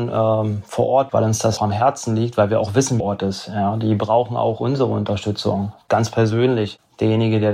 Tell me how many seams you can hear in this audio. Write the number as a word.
three